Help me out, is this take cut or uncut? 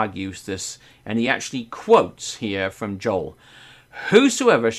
uncut